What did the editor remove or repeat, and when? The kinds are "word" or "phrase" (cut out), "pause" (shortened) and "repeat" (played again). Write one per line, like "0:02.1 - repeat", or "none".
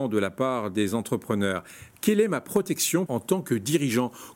0:03.1 - word